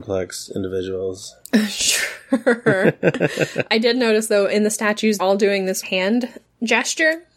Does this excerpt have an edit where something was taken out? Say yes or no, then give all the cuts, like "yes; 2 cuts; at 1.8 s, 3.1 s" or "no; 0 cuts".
yes; 3 cuts; at 3.7 s, 5.2 s, 5.8 s